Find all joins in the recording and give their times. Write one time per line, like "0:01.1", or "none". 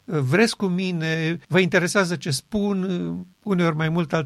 0:01.4
0:03.3

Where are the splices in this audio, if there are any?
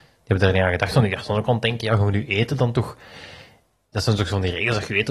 none

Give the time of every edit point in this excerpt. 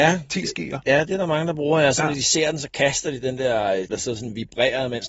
0:03.9

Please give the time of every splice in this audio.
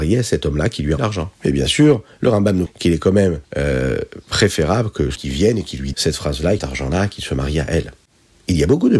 0:01.0
0:01.3
0:02.7
0:03.4
0:05.2
0:05.9
0:06.6

